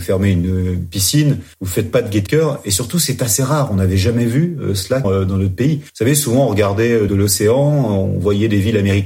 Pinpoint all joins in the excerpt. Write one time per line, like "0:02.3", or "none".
0:01.5
0:02.3
0:05.0
0:05.9
0:07.1